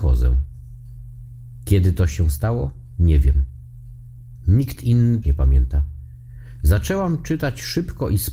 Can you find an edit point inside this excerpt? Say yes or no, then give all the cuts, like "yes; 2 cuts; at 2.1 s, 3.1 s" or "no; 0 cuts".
yes; 1 cut; at 5.2 s